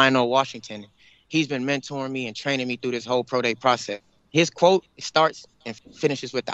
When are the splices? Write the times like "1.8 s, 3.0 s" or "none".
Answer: none